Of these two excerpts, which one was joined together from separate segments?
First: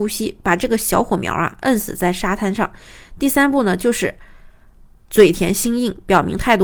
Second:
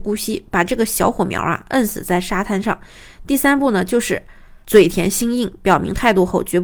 second; 1 cut; at 4.6 s

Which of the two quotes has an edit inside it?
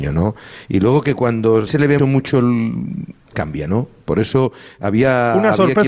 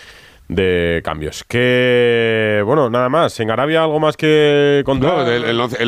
first; 3 cuts; at 1.7 s, 2.0 s, 3.3 s

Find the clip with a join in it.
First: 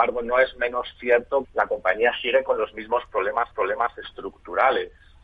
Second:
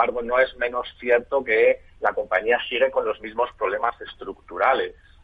first; 2 cuts; at 1.4 s, 3.5 s

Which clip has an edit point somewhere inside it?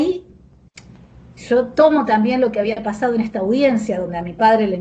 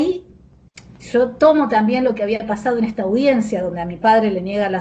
second; 1 cut; at 1.0 s

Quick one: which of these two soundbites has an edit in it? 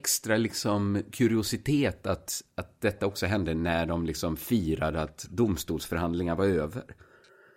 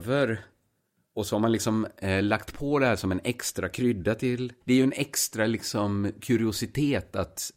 second; 1 cut; at 4.6 s

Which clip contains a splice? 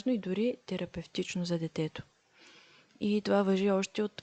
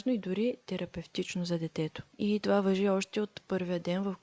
second; 1 cut; at 2.1 s

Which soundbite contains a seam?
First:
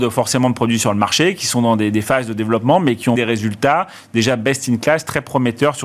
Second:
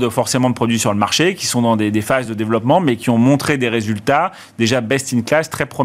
first; 1 cut; at 3.1 s

